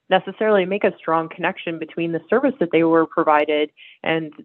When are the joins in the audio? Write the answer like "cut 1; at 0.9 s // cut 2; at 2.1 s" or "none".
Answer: none